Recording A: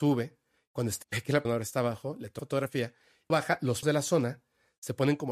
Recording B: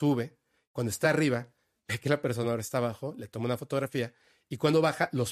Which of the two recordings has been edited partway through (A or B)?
A